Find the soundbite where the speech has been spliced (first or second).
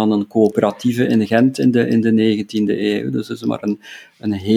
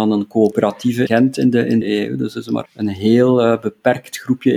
second